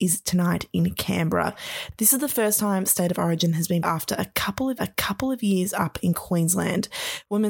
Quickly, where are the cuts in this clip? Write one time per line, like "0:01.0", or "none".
0:03.8
0:04.8